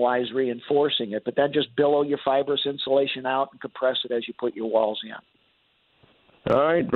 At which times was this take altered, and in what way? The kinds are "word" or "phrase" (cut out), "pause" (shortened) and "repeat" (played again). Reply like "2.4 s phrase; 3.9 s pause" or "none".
none